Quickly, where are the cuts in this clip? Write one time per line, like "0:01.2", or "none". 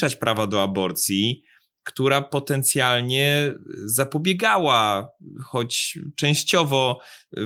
none